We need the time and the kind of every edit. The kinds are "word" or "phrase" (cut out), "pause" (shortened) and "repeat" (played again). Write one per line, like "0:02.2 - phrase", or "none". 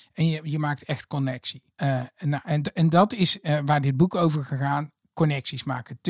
0:01.7 - pause